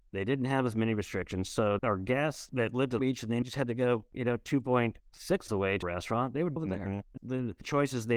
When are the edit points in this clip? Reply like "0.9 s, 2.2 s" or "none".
1.8 s, 3.0 s, 3.4 s, 5.5 s, 5.8 s, 6.6 s, 7.2 s